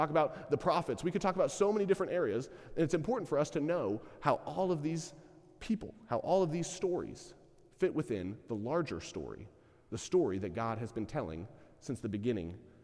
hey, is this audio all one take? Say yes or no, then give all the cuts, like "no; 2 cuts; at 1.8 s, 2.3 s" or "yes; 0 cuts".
yes; 0 cuts